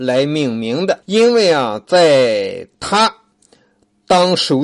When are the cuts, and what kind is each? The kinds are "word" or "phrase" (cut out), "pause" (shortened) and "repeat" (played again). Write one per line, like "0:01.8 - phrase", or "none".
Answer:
0:01.0 - pause